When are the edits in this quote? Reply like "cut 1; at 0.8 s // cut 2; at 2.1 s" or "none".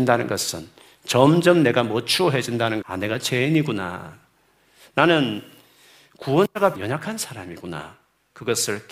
cut 1; at 2.8 s // cut 2; at 6.7 s